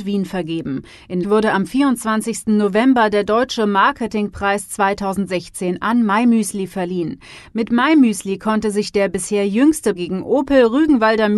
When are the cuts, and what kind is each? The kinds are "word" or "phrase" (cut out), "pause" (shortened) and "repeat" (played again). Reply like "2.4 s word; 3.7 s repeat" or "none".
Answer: 1.2 s word; 9.9 s word